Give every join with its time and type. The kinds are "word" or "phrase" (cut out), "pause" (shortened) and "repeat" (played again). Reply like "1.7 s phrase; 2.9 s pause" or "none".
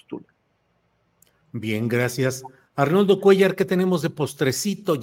none